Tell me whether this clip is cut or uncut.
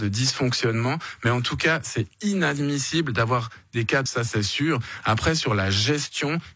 cut